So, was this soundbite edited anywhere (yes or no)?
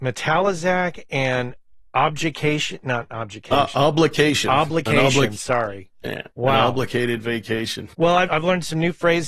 yes